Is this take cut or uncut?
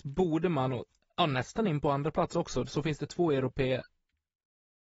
uncut